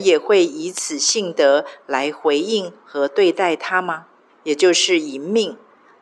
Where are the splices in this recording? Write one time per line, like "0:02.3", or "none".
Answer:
0:04.3